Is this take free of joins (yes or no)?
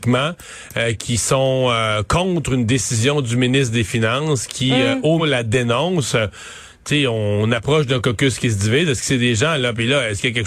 no